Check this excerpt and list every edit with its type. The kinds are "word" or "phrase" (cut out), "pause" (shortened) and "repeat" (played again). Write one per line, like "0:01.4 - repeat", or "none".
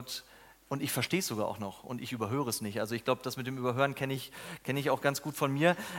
none